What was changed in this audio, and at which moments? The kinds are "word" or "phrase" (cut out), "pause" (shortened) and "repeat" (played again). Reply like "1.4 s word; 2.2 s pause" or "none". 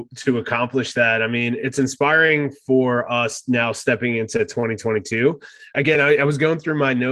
none